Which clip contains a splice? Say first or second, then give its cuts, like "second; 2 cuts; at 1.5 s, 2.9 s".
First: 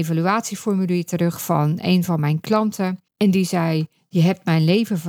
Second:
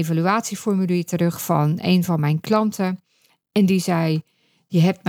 first; 2 cuts; at 3.1 s, 4.0 s